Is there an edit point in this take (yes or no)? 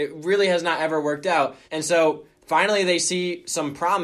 yes